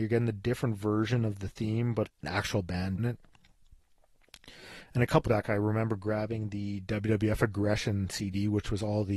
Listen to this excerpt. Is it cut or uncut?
cut